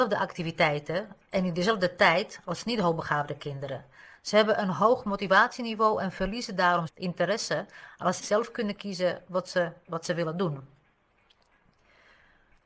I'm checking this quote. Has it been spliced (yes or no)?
yes